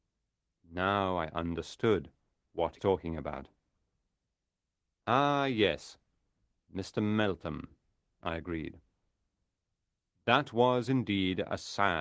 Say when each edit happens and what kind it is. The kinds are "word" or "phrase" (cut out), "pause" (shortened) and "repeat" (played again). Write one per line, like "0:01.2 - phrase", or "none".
0:02.8 - word